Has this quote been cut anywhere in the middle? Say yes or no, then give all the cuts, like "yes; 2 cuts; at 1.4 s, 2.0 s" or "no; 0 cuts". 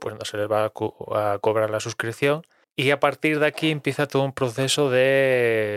yes; 1 cut; at 2.6 s